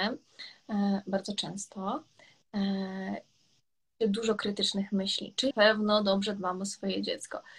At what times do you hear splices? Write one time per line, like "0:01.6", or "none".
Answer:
0:04.0
0:05.5